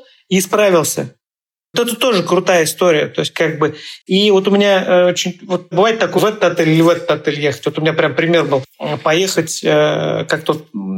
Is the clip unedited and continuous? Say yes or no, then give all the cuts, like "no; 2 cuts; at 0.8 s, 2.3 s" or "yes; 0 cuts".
no; 3 cuts; at 1.7 s, 5.7 s, 6.2 s